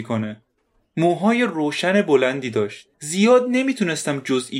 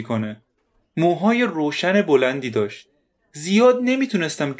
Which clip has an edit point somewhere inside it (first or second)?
first